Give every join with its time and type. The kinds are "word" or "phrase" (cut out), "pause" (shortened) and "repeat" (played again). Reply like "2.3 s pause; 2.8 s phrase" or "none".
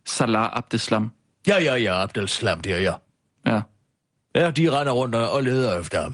none